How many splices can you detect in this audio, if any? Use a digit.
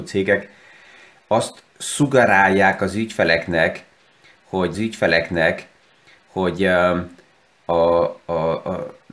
2